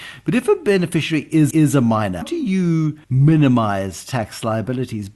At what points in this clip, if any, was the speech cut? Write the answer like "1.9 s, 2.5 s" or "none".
1.5 s, 2.2 s, 3.0 s